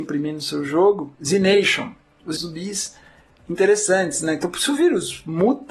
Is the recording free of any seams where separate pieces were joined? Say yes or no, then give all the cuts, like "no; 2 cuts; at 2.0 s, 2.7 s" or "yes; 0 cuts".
no; 1 cut; at 2.4 s